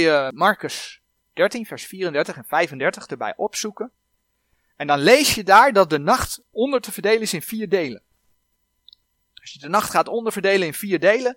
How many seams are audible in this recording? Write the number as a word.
zero